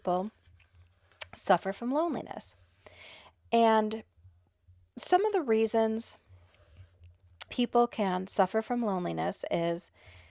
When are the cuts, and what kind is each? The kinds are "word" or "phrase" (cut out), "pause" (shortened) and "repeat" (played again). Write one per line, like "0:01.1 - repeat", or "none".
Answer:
0:07.5 - word